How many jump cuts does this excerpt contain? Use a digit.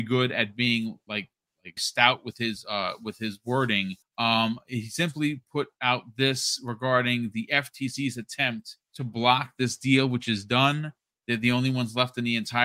3